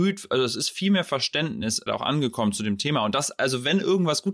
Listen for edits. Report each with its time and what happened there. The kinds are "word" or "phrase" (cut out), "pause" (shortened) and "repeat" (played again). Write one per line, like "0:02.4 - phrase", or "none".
0:01.9 - phrase